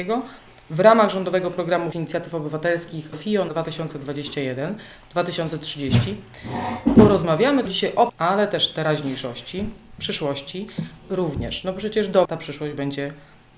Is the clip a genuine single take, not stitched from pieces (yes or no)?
no